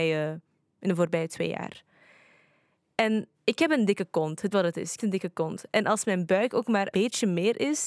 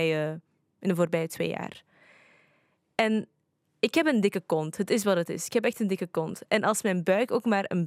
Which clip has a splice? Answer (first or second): first